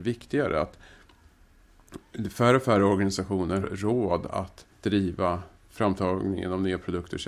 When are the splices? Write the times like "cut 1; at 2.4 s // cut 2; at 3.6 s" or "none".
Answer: cut 1; at 3.6 s // cut 2; at 4.7 s

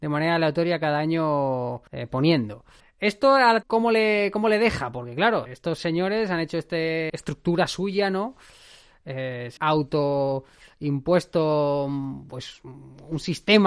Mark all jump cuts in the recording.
cut 1; at 1.9 s // cut 2; at 2.8 s // cut 3; at 3.6 s // cut 4; at 5.5 s // cut 5; at 7.1 s // cut 6; at 9.6 s

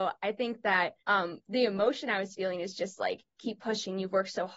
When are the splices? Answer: cut 1; at 1.0 s

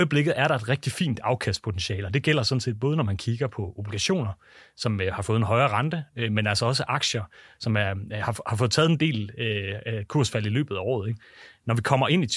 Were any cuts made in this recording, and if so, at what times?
none

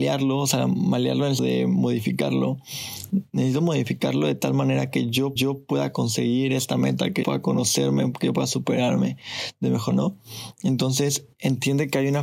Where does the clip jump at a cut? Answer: cut 1; at 1.4 s // cut 2; at 5.4 s // cut 3; at 7.2 s // cut 4; at 9.9 s // cut 5; at 11.3 s

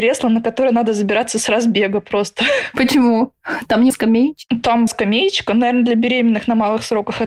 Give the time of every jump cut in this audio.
cut 1; at 3.9 s // cut 2; at 4.9 s

